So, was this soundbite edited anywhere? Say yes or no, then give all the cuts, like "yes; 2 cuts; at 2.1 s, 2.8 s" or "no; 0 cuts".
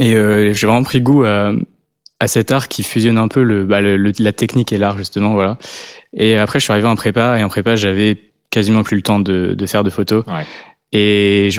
no; 0 cuts